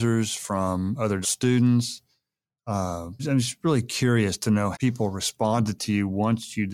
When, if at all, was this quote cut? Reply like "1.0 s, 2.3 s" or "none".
1.2 s, 3.2 s, 4.7 s